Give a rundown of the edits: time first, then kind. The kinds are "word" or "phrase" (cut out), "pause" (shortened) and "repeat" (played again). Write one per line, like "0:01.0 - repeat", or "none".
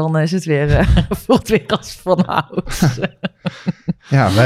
0:01.4 - word